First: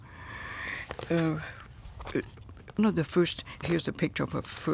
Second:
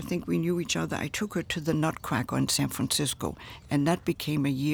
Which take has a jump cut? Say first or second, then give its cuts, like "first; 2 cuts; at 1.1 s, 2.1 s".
first; 2 cuts; at 2.8 s, 3.6 s